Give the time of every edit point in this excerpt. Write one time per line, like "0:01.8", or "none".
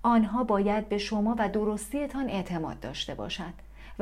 none